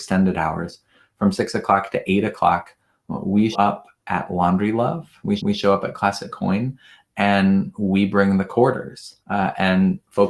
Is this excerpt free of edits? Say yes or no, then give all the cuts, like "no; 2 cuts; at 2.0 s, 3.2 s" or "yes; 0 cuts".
no; 3 cuts; at 3.5 s, 5.4 s, 9.2 s